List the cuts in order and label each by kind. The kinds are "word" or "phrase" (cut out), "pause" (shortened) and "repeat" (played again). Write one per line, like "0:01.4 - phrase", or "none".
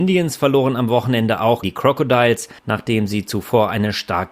0:01.6 - word
0:02.6 - pause